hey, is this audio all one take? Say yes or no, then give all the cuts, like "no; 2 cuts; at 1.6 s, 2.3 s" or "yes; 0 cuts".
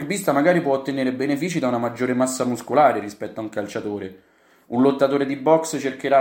yes; 0 cuts